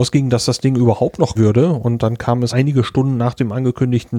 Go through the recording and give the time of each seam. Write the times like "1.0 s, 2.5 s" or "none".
1.4 s, 2.5 s